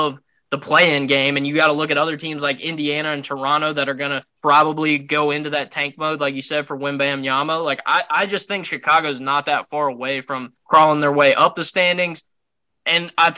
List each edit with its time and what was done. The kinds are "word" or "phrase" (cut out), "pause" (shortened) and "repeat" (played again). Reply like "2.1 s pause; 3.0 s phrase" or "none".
4.3 s pause; 10.6 s pause